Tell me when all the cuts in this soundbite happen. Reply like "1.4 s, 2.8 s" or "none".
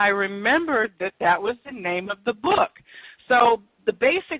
none